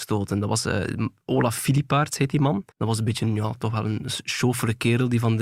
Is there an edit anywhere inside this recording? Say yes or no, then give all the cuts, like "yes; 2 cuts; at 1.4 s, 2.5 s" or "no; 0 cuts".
yes; 1 cut; at 2.7 s